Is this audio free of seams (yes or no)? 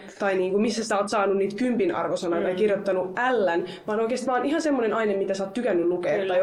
yes